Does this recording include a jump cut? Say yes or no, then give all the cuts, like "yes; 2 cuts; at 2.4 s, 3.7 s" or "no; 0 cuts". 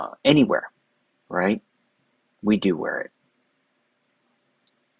no; 0 cuts